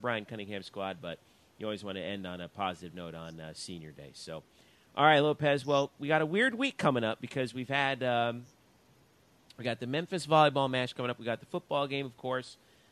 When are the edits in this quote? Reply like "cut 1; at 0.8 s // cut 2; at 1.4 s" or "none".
none